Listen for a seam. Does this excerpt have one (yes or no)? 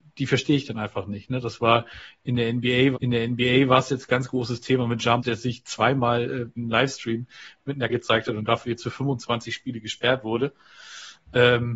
yes